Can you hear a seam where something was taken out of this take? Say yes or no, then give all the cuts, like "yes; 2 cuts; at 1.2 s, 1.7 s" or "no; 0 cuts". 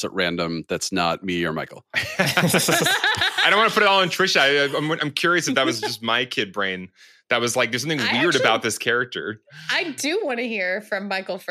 no; 0 cuts